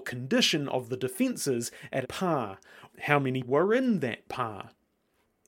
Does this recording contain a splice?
yes; 3 cuts; at 2.0 s, 2.9 s, 3.4 s

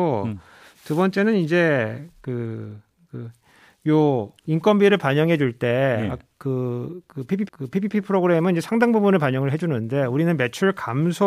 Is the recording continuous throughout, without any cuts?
no; 2 cuts; at 4.4 s, 7.5 s

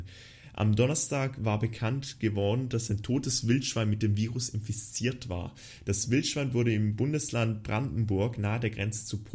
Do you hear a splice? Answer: no; 0 cuts

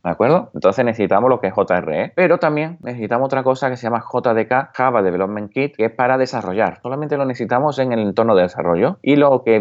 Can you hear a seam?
no; 0 cuts

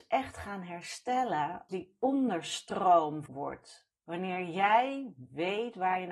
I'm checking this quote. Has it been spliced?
yes; 3 cuts; at 1.7 s, 3.3 s, 4.0 s

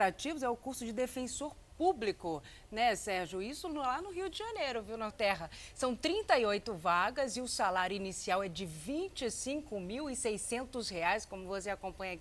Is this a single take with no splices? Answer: no; 1 cut; at 5.1 s

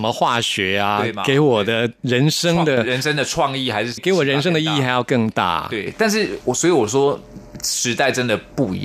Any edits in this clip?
yes; 1 cut; at 4.0 s

